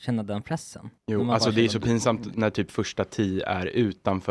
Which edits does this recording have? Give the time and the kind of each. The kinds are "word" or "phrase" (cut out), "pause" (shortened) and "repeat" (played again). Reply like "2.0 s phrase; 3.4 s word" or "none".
1.0 s pause